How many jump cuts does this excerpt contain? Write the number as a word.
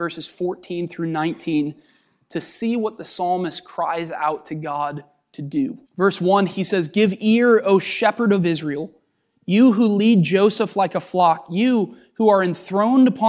one